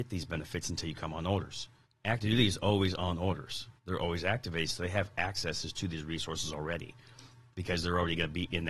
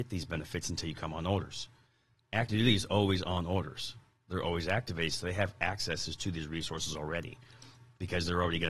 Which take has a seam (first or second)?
first